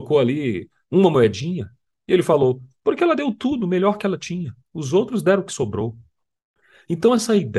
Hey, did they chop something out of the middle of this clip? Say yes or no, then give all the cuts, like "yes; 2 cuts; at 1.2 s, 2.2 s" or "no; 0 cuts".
no; 0 cuts